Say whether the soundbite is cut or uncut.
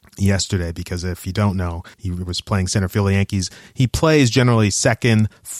cut